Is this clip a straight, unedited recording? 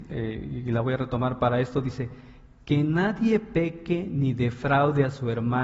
yes; 0 cuts

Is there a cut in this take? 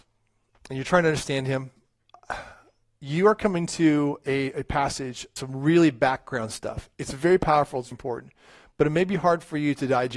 yes; 2 cuts; at 5.4 s, 7.9 s

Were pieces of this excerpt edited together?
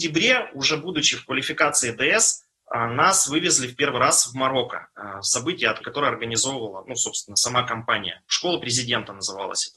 yes; 1 cut; at 5.8 s

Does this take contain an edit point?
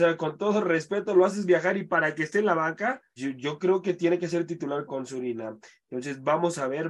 yes; 2 cuts; at 3.2 s, 4.9 s

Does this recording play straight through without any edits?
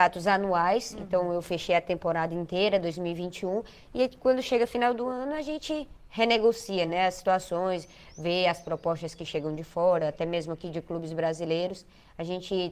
yes; 0 cuts

